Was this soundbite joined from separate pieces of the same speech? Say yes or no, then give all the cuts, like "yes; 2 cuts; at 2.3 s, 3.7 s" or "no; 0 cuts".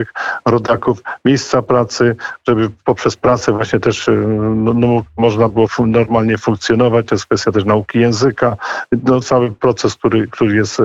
yes; 1 cut; at 9.2 s